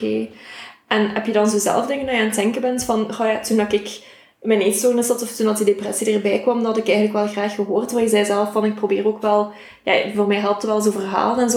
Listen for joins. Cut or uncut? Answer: uncut